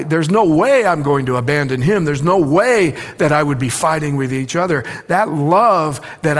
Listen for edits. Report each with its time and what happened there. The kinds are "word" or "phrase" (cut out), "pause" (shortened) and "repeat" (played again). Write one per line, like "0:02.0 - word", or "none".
none